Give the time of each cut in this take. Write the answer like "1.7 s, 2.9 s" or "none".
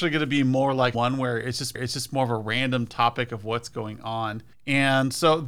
0.9 s, 1.7 s, 4.5 s